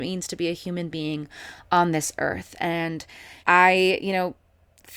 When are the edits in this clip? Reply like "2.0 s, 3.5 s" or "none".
3.4 s